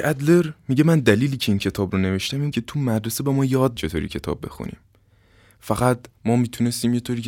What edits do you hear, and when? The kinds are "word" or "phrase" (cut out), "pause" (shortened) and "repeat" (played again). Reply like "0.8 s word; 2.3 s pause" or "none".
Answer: 2.5 s word; 3.8 s word

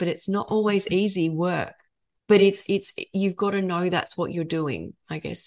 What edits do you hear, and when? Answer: none

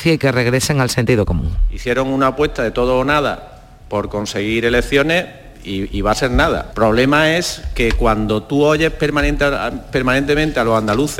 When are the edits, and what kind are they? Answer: none

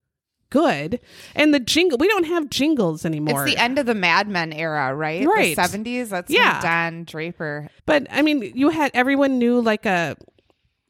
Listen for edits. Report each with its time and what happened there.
7.8 s pause

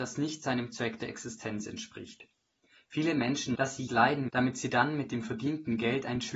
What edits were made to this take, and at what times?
3.5 s word; 3.9 s word; 4.3 s word

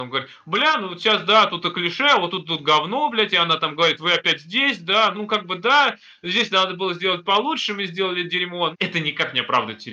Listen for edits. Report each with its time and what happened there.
5.1 s word; 8.7 s word

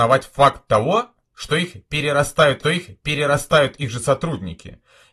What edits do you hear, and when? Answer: 2.6 s repeat

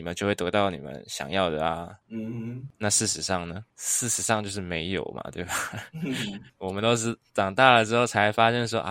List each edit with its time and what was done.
none

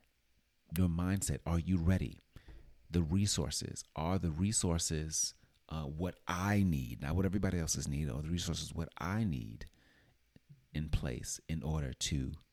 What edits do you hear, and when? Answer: none

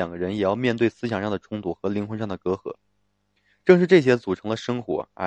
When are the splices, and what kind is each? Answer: none

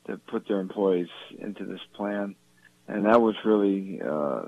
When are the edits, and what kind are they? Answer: none

